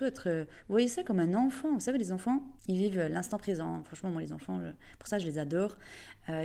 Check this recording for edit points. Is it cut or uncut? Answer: cut